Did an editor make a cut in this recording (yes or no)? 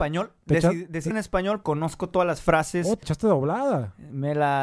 yes